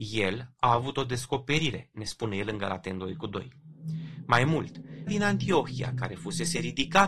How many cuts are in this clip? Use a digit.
1